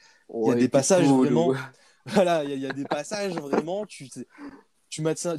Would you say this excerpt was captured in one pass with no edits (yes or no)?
yes